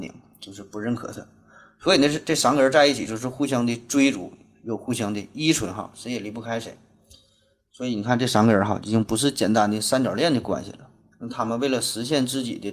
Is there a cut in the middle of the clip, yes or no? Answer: no